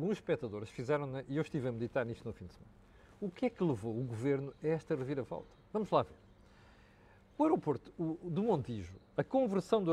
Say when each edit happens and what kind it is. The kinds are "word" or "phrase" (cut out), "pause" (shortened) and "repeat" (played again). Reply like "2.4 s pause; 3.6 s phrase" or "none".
none